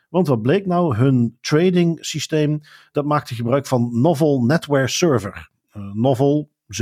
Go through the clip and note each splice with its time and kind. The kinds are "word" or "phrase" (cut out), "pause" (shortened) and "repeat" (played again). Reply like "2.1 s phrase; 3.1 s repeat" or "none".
none